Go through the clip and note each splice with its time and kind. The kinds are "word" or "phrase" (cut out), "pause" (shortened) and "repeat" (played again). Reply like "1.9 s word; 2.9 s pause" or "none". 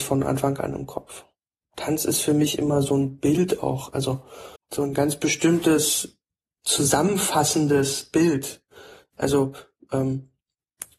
1.5 s pause; 4.6 s pause; 6.4 s pause